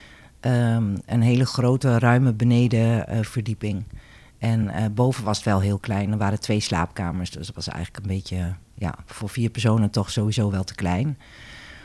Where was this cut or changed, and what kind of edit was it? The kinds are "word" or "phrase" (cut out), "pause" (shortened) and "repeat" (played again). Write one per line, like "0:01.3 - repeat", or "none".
none